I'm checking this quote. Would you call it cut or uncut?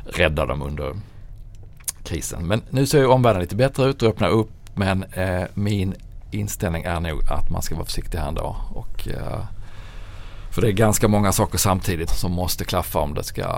cut